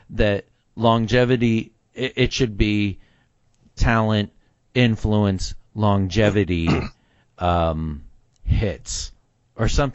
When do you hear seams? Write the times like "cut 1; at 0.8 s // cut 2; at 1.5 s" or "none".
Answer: none